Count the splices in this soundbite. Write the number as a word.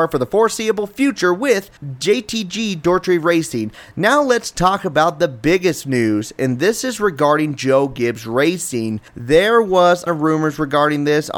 three